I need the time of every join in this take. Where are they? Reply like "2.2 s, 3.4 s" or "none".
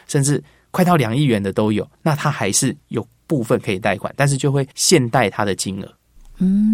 1.9 s, 4.7 s